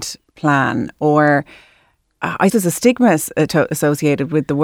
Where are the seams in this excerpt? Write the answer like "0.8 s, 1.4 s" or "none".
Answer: 2.5 s